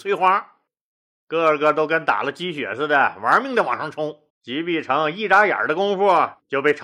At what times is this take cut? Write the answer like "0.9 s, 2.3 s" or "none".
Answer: 4.3 s